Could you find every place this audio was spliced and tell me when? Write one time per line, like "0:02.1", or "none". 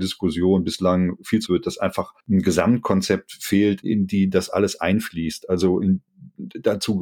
0:01.5
0:02.2
0:03.8